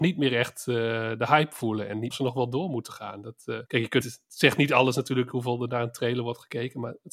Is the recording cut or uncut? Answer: cut